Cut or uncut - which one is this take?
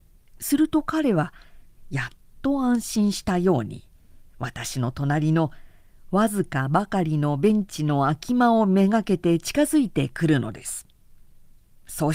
uncut